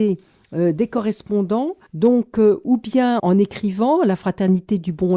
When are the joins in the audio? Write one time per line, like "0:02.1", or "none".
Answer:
0:01.9
0:03.2